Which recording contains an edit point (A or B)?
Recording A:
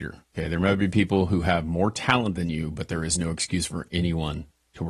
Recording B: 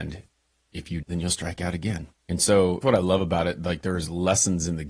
B